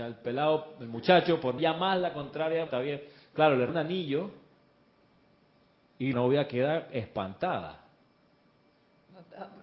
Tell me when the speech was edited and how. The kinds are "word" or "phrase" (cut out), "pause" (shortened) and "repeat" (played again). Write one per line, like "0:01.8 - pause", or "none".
0:01.6 - word
0:02.7 - word
0:03.7 - word
0:06.1 - word

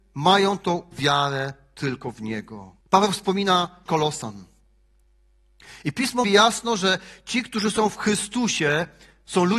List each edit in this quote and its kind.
0:00.9 - word
0:02.8 - pause
0:03.9 - word
0:06.2 - word

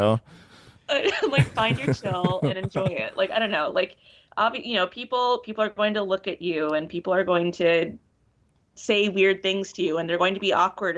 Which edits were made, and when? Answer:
none

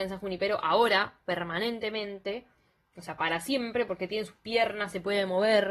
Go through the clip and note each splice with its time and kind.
none

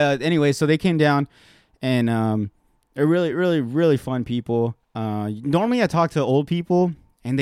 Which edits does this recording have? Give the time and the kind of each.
none

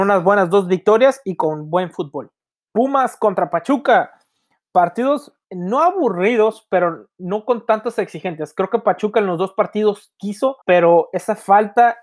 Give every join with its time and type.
0:02.5 - pause
0:05.4 - pause
0:10.6 - pause

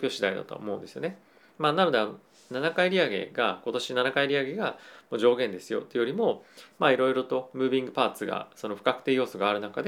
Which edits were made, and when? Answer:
none

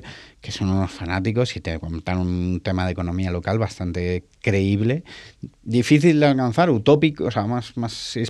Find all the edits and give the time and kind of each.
0:05.6 - pause

